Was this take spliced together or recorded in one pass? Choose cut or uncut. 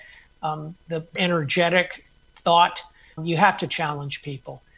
cut